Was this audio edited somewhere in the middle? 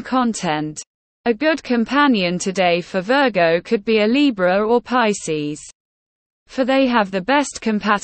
no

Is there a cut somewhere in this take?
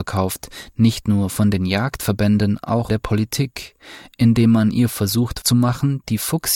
yes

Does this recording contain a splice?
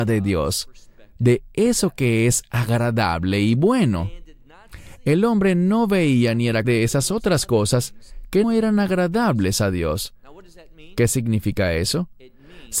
yes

